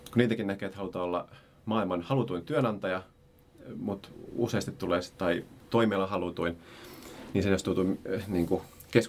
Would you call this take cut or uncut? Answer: uncut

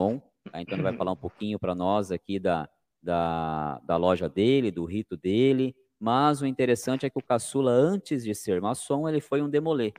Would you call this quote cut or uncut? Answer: uncut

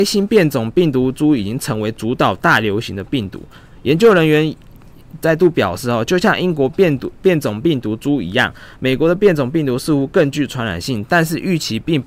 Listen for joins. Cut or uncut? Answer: uncut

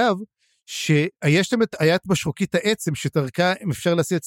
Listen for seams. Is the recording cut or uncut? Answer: uncut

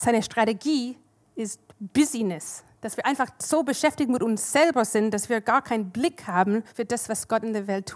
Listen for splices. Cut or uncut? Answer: cut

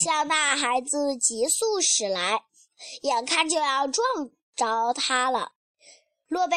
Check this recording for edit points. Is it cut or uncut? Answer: uncut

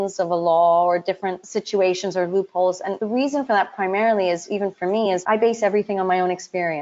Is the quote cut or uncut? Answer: uncut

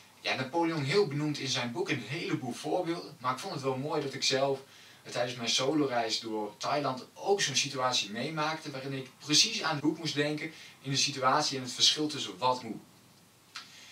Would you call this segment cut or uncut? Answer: cut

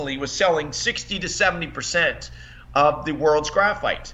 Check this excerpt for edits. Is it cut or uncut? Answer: uncut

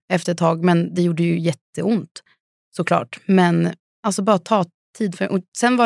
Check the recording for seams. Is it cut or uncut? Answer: uncut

